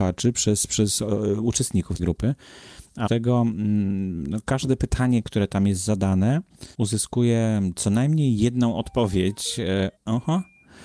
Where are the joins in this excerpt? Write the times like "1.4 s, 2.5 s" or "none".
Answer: 2.0 s, 3.1 s, 6.7 s, 10.0 s